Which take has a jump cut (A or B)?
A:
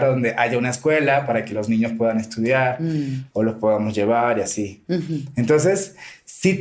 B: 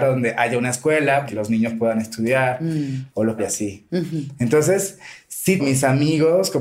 B